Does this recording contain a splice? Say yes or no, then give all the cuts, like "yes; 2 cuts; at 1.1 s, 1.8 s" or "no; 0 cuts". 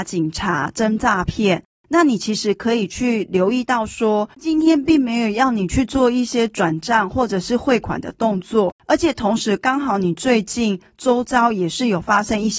yes; 1 cut; at 8.8 s